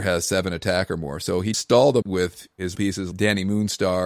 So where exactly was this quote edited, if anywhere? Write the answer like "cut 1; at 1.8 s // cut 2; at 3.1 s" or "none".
cut 1; at 1.5 s // cut 2; at 2.0 s // cut 3; at 2.7 s // cut 4; at 3.1 s